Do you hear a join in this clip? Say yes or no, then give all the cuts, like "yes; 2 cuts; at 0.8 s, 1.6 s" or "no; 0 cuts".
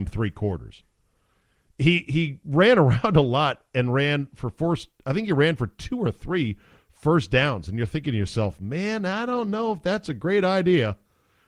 no; 0 cuts